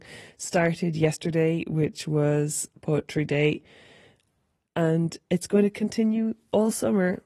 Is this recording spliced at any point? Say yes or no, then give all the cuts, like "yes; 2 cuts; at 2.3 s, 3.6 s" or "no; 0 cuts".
no; 0 cuts